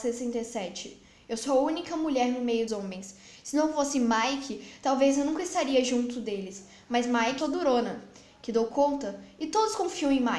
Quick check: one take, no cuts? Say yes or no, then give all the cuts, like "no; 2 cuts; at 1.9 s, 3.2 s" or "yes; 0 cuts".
no; 2 cuts; at 2.7 s, 7.4 s